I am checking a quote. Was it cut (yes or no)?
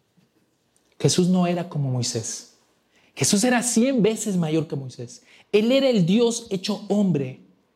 no